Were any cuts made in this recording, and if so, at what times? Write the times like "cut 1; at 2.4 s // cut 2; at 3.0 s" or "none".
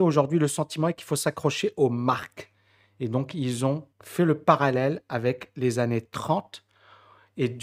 cut 1; at 3.9 s